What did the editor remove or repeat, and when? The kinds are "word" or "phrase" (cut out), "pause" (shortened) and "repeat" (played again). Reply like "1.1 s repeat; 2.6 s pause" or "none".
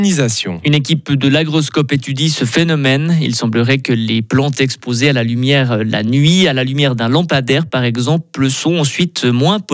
none